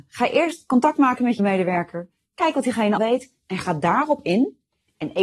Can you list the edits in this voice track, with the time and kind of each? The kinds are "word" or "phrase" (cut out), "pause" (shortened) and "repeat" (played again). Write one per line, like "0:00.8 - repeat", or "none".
0:01.4 - word
0:03.0 - word